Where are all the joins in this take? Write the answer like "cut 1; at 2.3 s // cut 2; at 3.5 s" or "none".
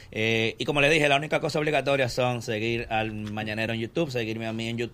none